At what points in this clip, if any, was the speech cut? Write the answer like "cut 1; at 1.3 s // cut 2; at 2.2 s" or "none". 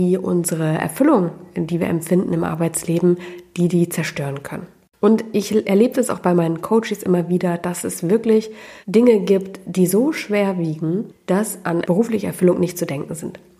cut 1; at 8.8 s